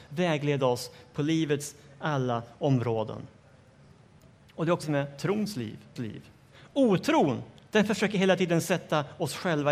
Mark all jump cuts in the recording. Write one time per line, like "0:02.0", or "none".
0:04.8
0:06.0